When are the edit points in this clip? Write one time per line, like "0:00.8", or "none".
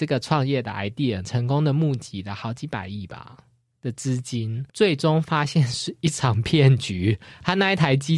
0:01.2
0:04.7

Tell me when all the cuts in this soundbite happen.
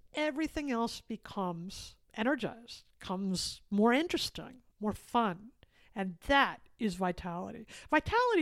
0:02.0
0:04.7

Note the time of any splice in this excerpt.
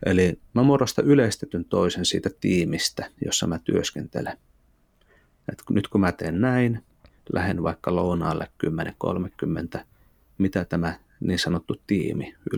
none

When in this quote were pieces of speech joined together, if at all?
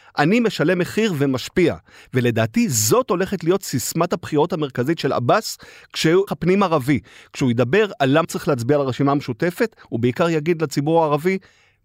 0:06.3
0:08.2

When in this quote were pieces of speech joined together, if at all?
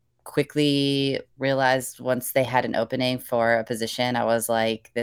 0:01.3

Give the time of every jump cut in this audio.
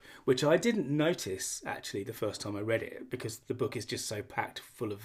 none

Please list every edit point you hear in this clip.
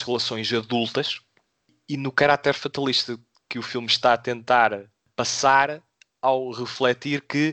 none

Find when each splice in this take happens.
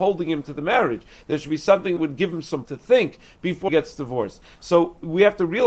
0:02.0
0:02.6
0:03.7

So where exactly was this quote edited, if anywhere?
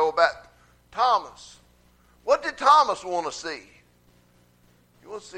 none

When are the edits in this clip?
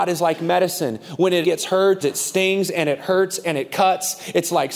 0:01.4
0:02.0

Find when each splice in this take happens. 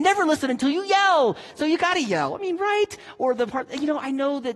none

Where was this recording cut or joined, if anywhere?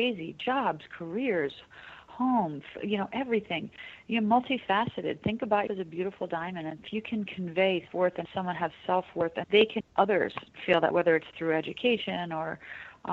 0:05.7
0:07.9
0:08.3
0:09.4
0:09.8
0:10.9

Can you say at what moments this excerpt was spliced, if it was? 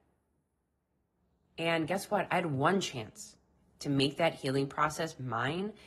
none

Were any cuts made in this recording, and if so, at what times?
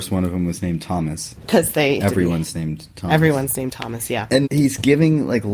0:01.3
0:02.0
0:04.4

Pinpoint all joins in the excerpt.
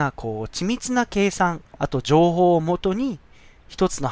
0:01.7

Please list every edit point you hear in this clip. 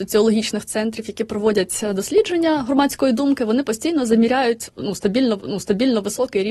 0:05.4

